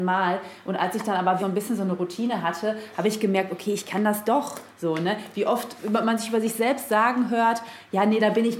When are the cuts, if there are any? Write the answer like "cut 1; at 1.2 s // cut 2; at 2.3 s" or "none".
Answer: cut 1; at 1.4 s